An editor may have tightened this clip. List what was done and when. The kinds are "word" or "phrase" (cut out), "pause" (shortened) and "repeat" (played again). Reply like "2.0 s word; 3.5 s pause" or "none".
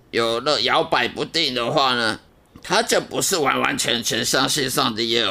2.3 s pause